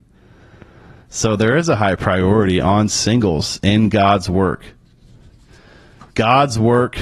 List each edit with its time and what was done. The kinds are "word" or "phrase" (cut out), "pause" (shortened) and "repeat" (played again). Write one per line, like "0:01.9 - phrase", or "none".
0:06.1 - pause